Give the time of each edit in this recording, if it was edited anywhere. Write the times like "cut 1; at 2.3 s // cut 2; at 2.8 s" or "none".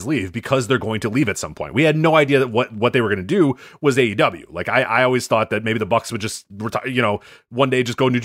none